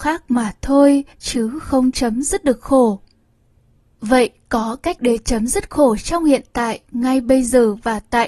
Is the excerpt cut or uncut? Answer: cut